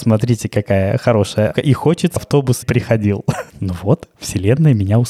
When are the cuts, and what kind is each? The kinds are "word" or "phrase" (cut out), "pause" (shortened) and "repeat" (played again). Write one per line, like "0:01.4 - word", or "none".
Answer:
0:01.5 - word
0:02.2 - word
0:02.6 - word
0:03.5 - pause